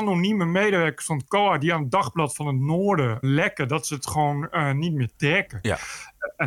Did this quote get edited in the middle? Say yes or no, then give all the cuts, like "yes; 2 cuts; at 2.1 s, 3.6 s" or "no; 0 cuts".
yes; 1 cut; at 3.2 s